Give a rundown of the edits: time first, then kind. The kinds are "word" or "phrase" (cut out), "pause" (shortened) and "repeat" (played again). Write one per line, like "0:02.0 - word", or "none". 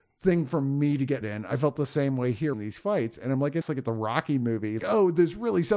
0:01.2 - word
0:02.5 - word
0:03.6 - phrase
0:04.8 - word